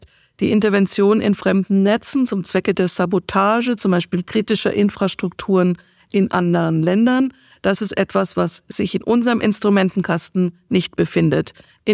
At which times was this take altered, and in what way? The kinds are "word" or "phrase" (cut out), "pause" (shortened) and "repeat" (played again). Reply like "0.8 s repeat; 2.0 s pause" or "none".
none